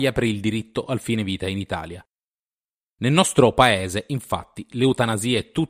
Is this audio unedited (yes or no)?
yes